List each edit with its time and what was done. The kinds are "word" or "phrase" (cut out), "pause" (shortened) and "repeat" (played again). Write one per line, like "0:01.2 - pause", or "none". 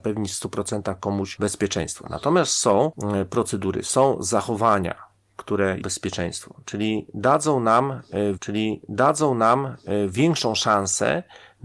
0:05.8 - phrase
0:08.4 - repeat